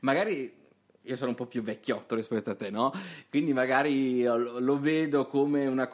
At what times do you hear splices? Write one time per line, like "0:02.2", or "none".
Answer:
none